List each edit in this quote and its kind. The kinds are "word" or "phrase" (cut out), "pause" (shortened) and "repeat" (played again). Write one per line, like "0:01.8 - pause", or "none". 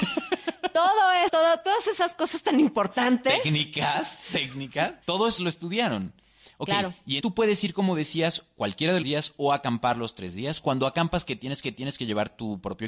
0:01.3 - word
0:05.0 - pause
0:05.4 - word
0:07.2 - word
0:09.0 - phrase
0:11.6 - repeat